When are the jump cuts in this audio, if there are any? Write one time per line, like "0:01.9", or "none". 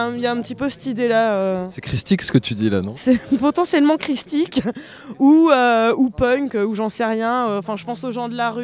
0:03.0